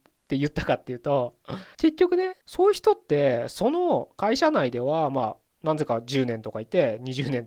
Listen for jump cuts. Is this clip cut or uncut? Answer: cut